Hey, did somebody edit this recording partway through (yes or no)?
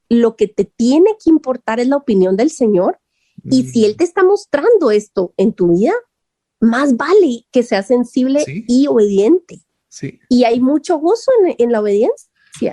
no